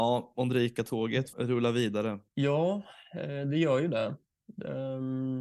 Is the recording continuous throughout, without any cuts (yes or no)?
no